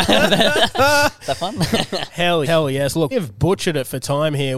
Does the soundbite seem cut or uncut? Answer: cut